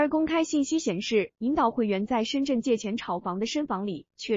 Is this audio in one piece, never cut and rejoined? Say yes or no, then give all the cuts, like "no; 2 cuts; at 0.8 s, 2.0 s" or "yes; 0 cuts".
yes; 0 cuts